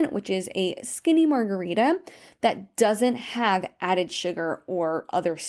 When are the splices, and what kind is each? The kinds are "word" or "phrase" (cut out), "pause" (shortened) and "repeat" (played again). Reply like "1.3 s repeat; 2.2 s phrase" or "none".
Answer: none